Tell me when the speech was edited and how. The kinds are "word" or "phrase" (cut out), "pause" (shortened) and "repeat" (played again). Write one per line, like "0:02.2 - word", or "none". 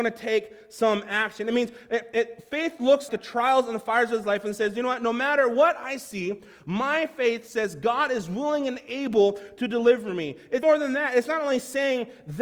0:03.1 - word
0:10.6 - word